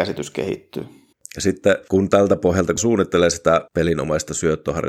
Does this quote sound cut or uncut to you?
cut